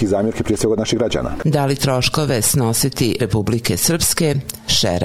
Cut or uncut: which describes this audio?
cut